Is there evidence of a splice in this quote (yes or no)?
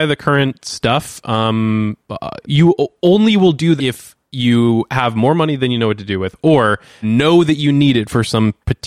yes